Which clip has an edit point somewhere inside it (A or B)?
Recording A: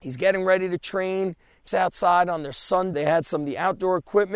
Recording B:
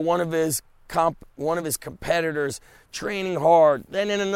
A